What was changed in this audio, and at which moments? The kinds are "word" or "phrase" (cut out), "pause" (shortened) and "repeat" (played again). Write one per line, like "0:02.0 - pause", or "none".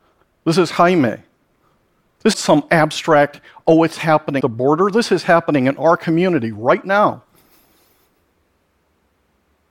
0:02.3 - word
0:04.4 - word